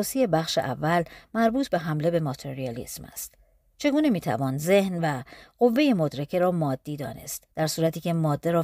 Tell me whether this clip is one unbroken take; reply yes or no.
no